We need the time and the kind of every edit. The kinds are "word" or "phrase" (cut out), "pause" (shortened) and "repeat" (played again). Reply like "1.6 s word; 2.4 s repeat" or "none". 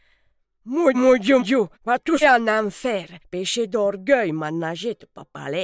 0.9 s word; 1.4 s word; 1.7 s pause; 2.2 s word; 3.2 s pause